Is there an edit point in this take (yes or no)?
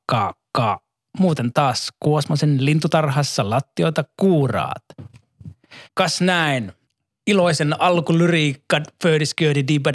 yes